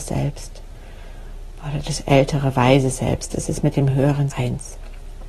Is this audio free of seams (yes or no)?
no